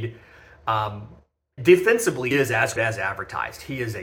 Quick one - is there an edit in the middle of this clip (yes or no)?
yes